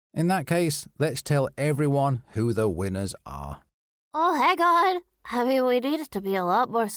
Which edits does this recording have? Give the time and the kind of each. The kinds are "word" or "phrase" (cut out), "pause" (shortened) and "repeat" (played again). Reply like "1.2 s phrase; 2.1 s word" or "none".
none